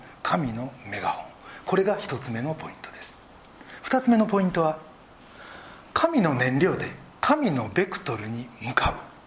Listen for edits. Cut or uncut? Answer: cut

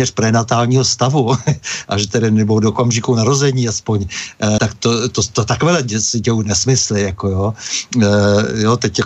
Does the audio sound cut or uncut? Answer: cut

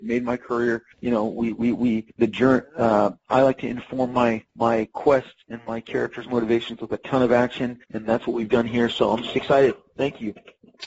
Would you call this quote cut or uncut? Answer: cut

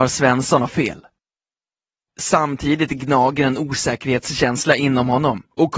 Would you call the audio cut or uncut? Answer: uncut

